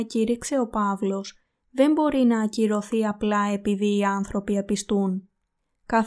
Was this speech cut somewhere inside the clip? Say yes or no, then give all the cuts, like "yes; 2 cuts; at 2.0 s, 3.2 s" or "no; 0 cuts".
no; 0 cuts